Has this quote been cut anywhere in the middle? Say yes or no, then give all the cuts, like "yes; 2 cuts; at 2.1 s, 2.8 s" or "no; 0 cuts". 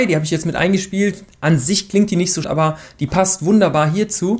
yes; 1 cut; at 2.4 s